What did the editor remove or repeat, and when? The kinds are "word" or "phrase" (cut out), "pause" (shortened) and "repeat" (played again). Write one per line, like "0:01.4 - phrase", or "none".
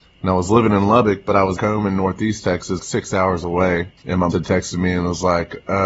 0:01.6 - word
0:02.8 - word
0:04.0 - pause
0:04.3 - word

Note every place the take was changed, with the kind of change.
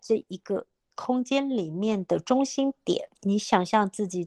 0:03.2 - pause

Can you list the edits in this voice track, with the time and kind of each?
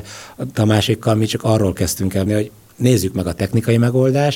0:02.3 - word

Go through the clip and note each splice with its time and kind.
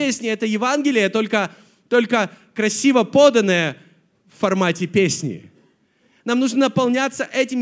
none

